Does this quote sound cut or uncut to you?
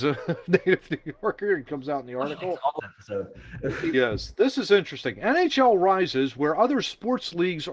cut